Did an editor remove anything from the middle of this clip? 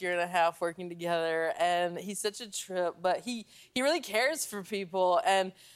no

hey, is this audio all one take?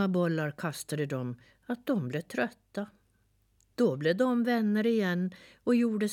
yes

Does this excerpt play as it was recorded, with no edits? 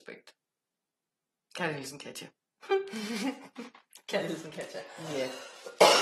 yes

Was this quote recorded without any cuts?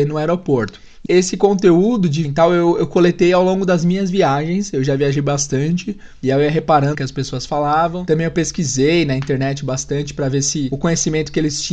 no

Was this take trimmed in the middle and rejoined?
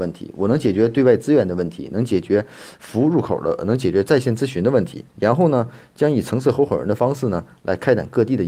yes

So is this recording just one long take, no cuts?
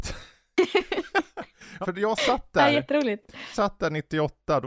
no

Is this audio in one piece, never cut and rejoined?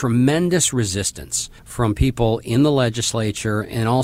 no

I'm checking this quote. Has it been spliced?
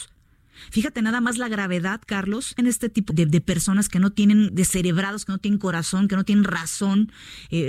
yes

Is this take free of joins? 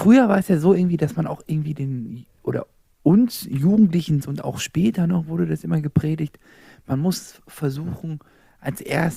no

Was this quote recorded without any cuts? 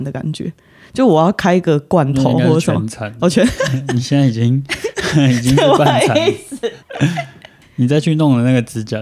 no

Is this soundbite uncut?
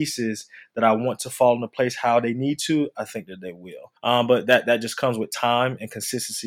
no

